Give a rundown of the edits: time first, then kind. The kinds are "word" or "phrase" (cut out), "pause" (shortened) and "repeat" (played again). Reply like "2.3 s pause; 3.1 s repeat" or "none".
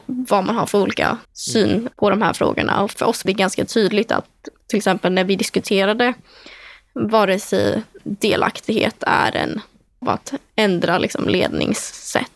1.2 s pause; 2.9 s word; 3.3 s word; 8.0 s word; 10.0 s phrase